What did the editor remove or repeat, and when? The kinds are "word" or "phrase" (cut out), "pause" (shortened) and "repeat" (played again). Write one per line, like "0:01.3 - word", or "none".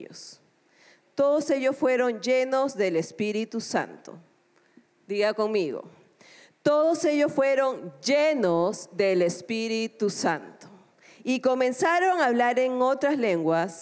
none